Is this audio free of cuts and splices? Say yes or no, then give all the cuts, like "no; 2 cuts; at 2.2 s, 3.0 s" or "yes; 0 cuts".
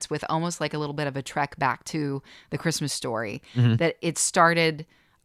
yes; 0 cuts